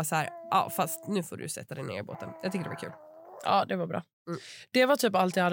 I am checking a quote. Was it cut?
no; 0 cuts

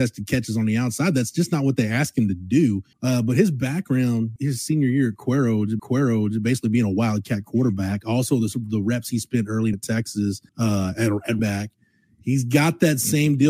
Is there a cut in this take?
yes; 6 cuts; at 2.9 s, 4.4 s, 5.8 s, 9.7 s, 10.5 s, 11.4 s

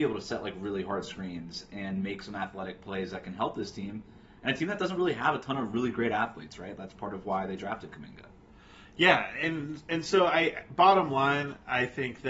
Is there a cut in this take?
no; 0 cuts

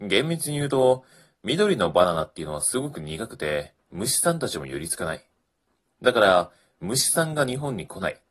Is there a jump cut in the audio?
no; 0 cuts

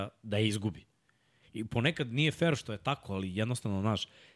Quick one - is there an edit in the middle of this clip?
no; 0 cuts

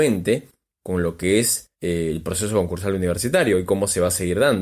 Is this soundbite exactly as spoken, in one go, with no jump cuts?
no; 1 cut; at 1.7 s

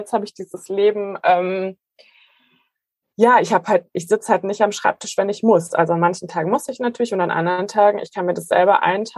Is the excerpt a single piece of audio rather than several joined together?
yes; 0 cuts

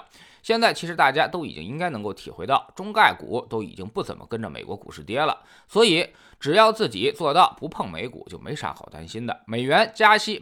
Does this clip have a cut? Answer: no; 0 cuts

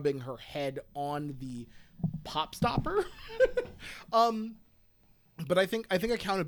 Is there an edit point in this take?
no; 0 cuts

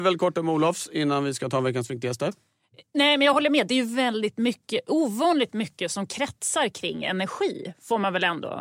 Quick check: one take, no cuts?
yes; 0 cuts

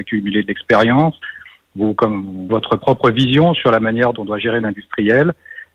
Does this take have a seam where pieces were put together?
yes; 3 cuts; at 2.5 s, 4.1 s, 4.6 s

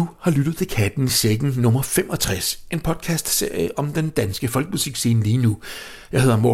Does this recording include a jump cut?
no; 0 cuts

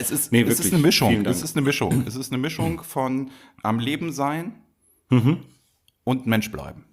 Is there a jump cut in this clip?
no; 0 cuts

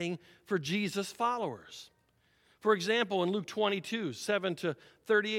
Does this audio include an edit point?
no; 0 cuts

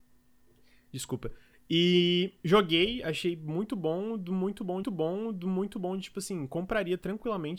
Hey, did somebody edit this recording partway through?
yes; 2 cuts; at 2.4 s, 4.8 s

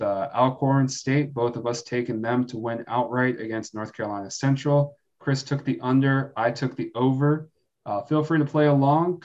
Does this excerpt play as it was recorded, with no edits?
yes; 0 cuts

